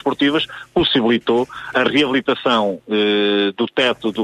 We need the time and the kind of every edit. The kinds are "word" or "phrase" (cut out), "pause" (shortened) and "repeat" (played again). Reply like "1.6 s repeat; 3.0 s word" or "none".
1.7 s word

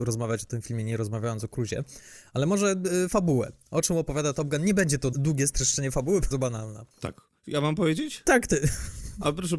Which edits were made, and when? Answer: 5.1 s word; 6.3 s phrase; 6.9 s pause

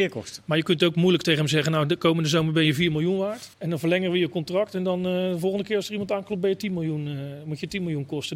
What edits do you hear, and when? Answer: 3.5 s pause

